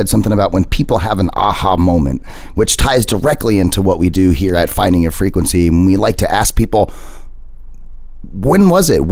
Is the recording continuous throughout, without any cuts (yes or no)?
yes